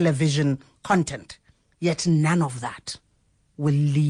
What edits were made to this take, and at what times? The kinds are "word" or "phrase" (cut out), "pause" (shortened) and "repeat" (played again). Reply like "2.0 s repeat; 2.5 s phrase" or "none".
1.6 s pause